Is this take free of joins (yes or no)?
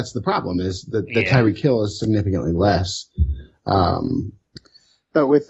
yes